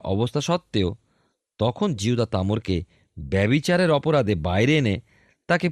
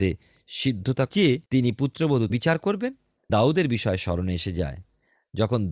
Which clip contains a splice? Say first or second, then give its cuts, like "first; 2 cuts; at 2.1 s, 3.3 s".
second; 4 cuts; at 1.1 s, 1.5 s, 2.3 s, 3.3 s